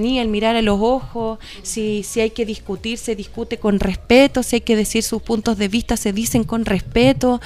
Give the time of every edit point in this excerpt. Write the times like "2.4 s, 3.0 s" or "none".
none